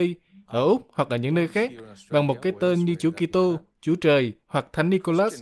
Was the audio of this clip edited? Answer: no; 0 cuts

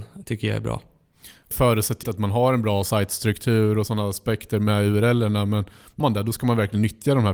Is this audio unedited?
no; 3 cuts; at 1.5 s, 2.0 s, 6.0 s

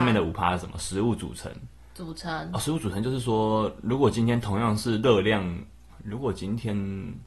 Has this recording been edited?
yes; 1 cut; at 5.9 s

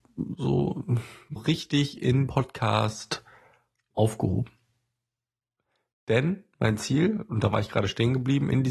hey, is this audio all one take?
no; 3 cuts; at 1.4 s, 2.3 s, 3.9 s

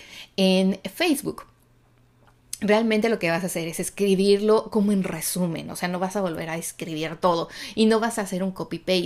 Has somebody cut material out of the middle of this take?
no; 0 cuts

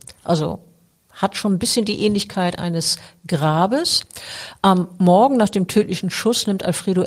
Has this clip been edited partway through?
no; 0 cuts

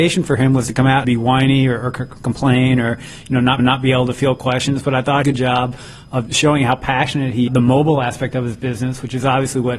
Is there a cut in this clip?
yes; 5 cuts; at 1.0 s, 3.6 s, 5.2 s, 6.3 s, 7.5 s

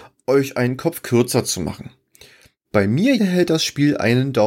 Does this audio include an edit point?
yes; 1 cut; at 3.2 s

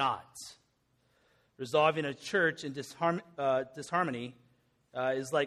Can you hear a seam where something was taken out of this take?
no; 0 cuts

